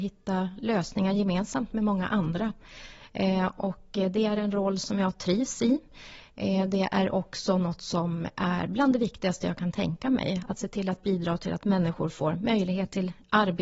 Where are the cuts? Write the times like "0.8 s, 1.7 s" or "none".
none